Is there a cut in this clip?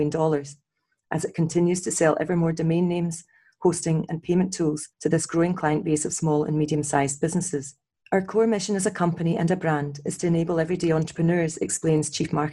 yes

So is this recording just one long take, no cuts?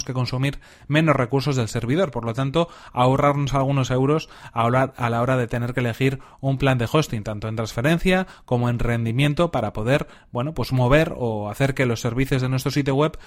yes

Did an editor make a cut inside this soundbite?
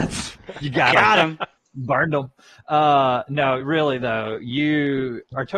no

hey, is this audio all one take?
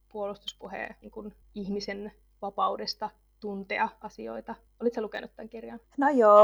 no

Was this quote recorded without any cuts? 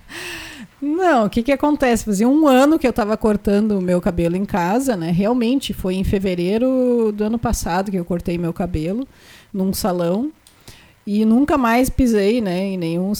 yes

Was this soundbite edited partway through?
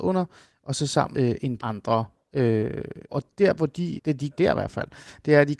yes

